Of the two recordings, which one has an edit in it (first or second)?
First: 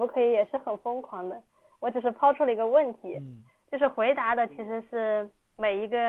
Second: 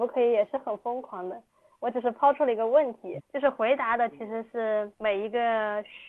second